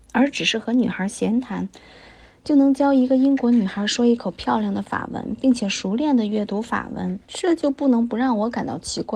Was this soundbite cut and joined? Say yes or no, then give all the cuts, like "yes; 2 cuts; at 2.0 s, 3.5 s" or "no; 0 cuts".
yes; 1 cut; at 7.2 s